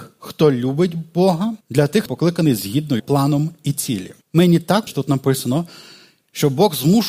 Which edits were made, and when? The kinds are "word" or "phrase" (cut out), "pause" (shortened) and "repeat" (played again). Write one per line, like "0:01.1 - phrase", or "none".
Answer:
0:01.6 - pause
0:02.1 - word
0:03.0 - word
0:04.2 - pause
0:04.9 - word

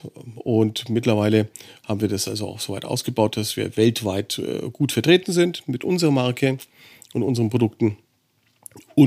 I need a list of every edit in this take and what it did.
none

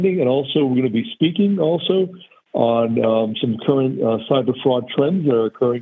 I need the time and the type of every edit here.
none

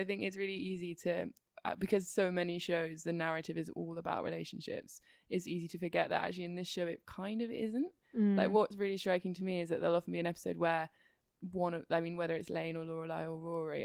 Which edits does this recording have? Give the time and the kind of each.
none

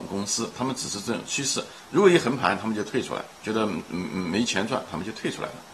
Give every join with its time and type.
0:03.3 - pause

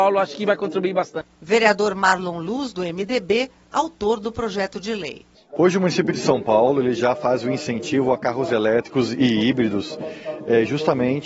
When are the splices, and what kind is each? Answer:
none

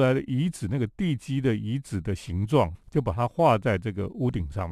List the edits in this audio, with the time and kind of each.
0:02.7 - word

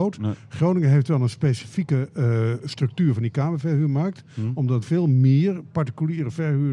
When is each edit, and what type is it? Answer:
0:04.8 - word

